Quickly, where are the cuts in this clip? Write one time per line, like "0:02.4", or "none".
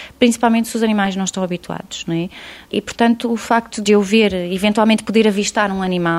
none